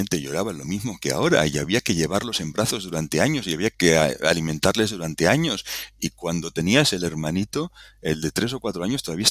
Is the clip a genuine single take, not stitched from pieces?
no; 1 cut; at 3.7 s

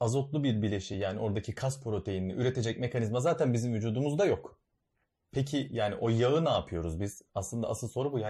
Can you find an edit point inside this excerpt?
no; 0 cuts

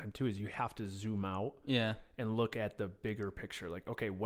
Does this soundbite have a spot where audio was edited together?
no; 0 cuts

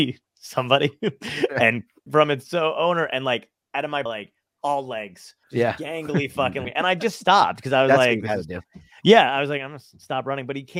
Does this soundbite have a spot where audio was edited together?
yes; 4 cuts; at 2.1 s, 4.1 s, 5.4 s, 6.6 s

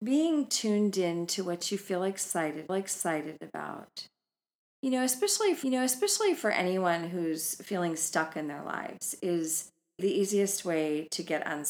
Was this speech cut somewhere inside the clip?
yes; 3 cuts; at 2.7 s, 5.6 s, 10.0 s

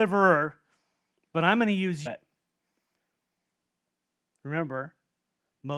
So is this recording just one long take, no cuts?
no; 1 cut; at 2.1 s

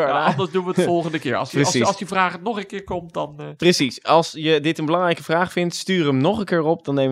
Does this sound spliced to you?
no; 0 cuts

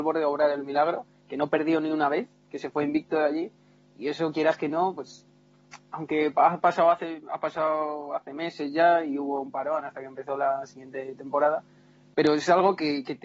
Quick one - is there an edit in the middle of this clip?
no; 0 cuts

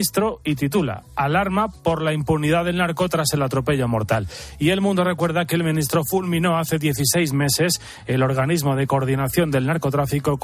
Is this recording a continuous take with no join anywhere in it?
yes; 0 cuts

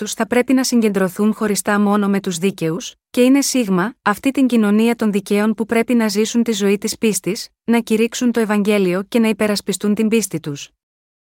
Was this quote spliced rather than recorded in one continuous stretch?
no; 0 cuts

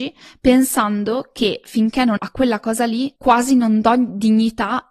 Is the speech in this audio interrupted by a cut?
yes; 2 cuts; at 2.2 s, 3.2 s

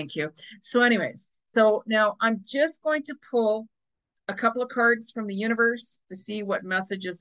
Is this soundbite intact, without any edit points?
yes; 0 cuts

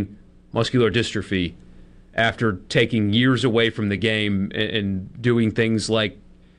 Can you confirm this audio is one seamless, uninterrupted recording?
yes; 0 cuts

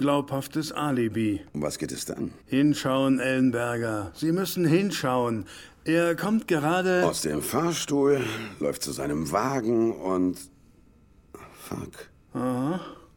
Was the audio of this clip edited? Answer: yes; 2 cuts; at 1.5 s, 2.4 s

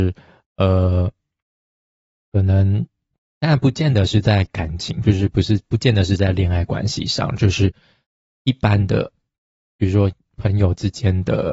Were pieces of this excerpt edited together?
no; 0 cuts

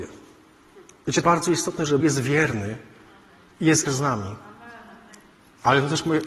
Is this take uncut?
no; 3 cuts; at 1.2 s, 2.0 s, 3.9 s

